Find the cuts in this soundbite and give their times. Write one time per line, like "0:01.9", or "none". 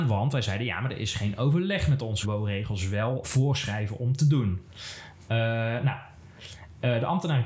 0:02.2
0:03.2